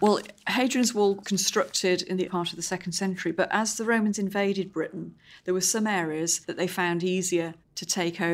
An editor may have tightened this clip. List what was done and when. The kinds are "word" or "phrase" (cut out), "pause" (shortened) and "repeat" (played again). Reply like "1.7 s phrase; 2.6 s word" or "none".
1.2 s word; 2.3 s word; 6.4 s pause